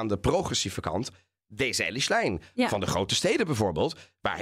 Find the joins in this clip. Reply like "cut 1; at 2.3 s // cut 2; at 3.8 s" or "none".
none